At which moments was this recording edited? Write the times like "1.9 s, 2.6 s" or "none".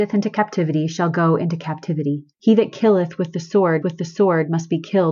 2.3 s, 3.8 s